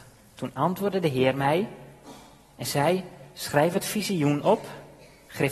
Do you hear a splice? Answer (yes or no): no